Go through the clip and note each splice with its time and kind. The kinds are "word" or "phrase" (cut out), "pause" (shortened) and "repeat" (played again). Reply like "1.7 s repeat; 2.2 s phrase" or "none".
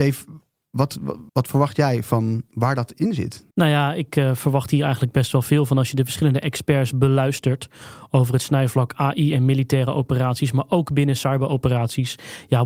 1.3 s pause; 3.5 s pause